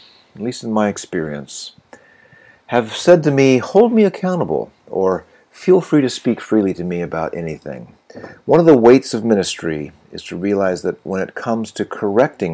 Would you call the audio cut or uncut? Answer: uncut